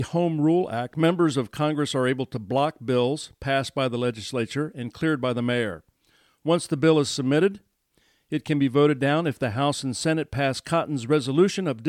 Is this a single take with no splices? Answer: yes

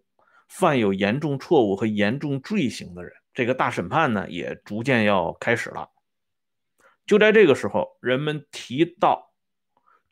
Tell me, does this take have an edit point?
yes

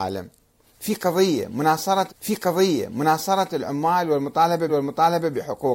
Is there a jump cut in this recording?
yes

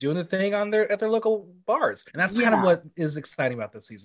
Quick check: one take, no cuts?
no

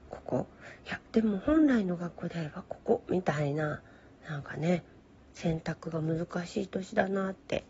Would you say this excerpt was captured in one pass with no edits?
yes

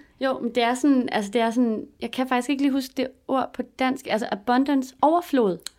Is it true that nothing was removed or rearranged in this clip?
yes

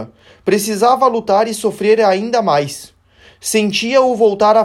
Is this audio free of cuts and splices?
yes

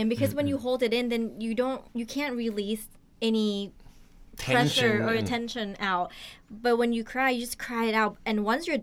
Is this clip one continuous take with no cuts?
no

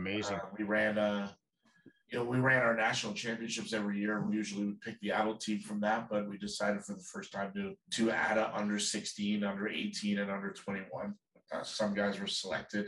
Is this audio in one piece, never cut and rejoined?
no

